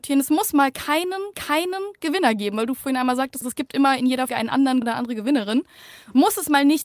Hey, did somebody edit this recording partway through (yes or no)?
yes